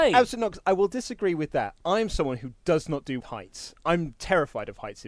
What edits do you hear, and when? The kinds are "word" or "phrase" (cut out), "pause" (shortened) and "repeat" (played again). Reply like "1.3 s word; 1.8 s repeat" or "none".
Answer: 3.2 s phrase